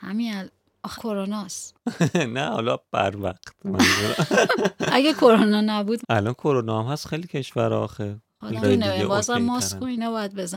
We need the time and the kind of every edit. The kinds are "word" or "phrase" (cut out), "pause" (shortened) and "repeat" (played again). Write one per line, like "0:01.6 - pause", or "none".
0:00.9 - word
0:06.0 - word
0:08.6 - word